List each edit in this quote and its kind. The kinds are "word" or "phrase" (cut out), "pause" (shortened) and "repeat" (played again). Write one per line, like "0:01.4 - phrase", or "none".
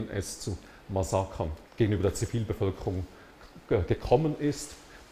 0:01.7 - pause

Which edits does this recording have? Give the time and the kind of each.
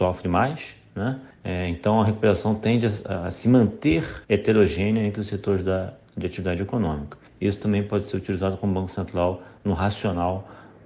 0:01.3 - pause
0:04.2 - pause
0:07.3 - pause

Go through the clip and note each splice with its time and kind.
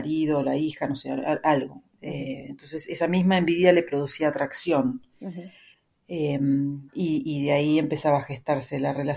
0:06.9 - pause

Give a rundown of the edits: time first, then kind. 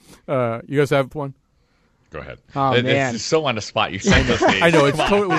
0:01.1 - phrase
0:02.5 - pause
0:04.0 - word

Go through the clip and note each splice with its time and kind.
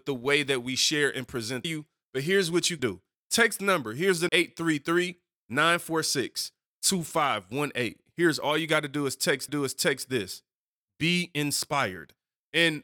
0:01.6 - phrase
0:02.8 - word
0:03.6 - word
0:04.3 - word
0:09.5 - repeat

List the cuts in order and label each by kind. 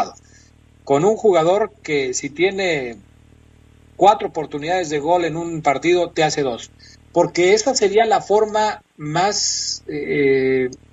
none

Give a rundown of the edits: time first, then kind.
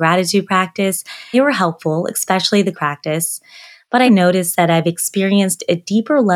0:01.3 - word
0:02.7 - word
0:04.1 - word

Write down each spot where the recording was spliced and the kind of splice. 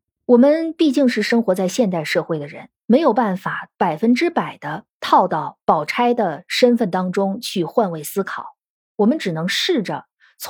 none

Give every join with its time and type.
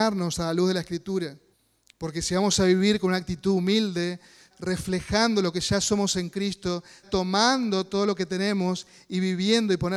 0:01.5 - pause
0:04.5 - word
0:07.0 - word

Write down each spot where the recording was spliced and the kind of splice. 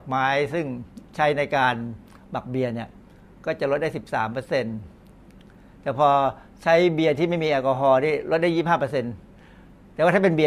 none

